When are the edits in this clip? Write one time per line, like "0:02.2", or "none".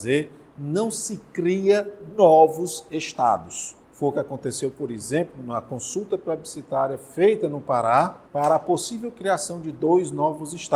0:03.8
0:08.2